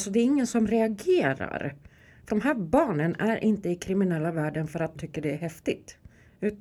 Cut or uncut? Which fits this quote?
cut